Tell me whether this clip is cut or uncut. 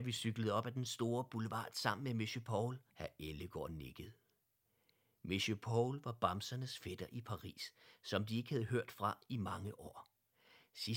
cut